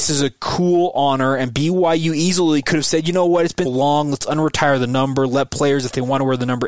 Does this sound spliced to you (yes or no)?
yes